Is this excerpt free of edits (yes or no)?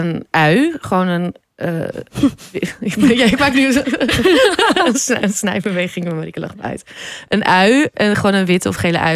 yes